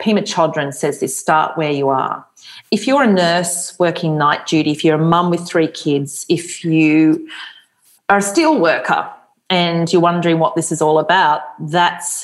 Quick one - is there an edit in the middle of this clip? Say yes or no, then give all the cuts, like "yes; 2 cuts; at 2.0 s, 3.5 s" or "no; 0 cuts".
no; 0 cuts